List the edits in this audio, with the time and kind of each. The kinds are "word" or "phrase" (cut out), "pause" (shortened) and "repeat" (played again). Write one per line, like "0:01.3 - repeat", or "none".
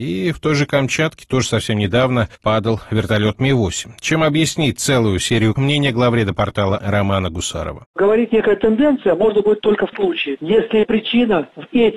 0:02.3 - pause
0:05.6 - word
0:06.8 - word
0:08.3 - phrase
0:09.9 - word